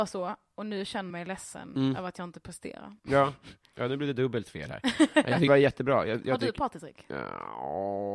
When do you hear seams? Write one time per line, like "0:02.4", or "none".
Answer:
0:01.1
0:03.0
0:05.5